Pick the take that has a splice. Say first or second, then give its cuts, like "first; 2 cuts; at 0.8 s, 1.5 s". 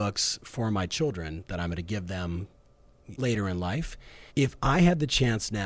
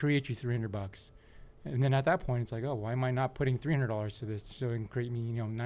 first; 2 cuts; at 3.2 s, 4.3 s